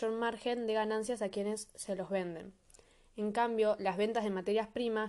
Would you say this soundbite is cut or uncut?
uncut